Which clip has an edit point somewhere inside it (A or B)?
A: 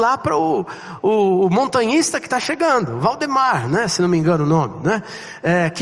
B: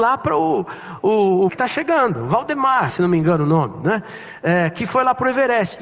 B